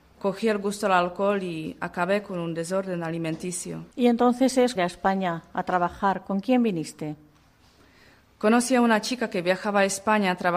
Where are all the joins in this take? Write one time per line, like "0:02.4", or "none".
0:03.9
0:04.8